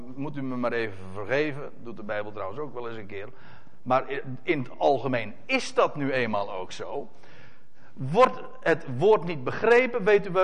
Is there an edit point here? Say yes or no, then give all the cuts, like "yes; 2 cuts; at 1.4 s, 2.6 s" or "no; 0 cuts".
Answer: no; 0 cuts